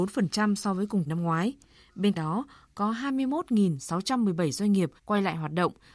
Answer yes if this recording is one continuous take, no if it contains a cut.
no